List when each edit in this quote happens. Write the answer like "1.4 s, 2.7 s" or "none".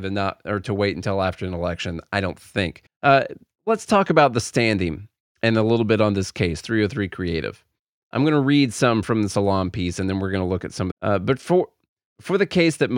2.9 s, 10.9 s